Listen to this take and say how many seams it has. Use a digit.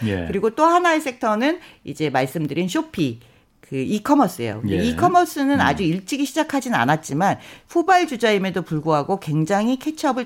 0